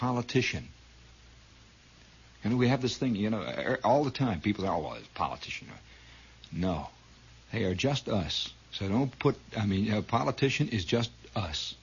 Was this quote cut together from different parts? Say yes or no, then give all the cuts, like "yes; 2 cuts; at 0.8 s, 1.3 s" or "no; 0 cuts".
yes; 2 cuts; at 7.3 s, 8.6 s